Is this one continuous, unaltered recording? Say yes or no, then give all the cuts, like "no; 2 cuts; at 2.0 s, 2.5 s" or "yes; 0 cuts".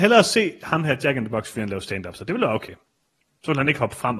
yes; 0 cuts